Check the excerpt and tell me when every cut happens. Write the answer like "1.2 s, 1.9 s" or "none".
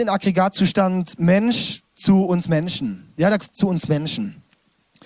1.9 s, 3.4 s